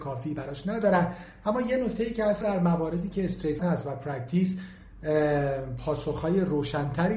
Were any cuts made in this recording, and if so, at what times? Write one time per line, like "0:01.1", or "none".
0:02.4
0:03.6

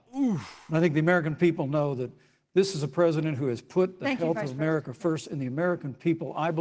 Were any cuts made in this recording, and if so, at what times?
none

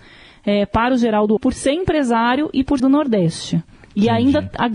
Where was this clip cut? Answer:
0:01.4
0:02.8

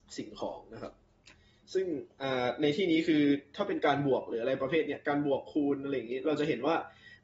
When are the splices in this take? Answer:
none

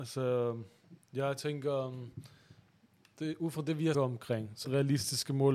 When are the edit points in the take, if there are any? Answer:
0:03.9
0:04.6

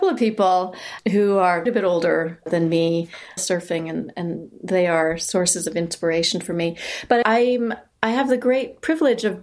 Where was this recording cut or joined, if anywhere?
0:01.7
0:03.4
0:07.2

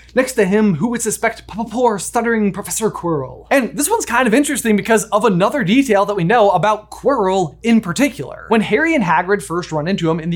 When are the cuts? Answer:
none

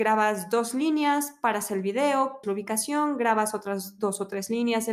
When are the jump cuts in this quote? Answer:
0:02.4

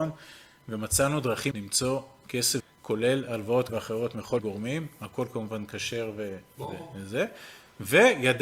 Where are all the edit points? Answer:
0:01.5
0:02.6
0:03.7
0:04.4

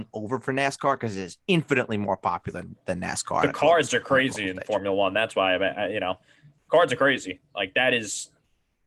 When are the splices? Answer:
none

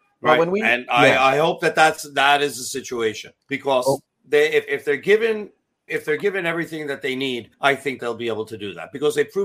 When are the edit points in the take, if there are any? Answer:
0:03.4
0:04.1
0:04.7
0:05.9
0:07.5
0:08.0

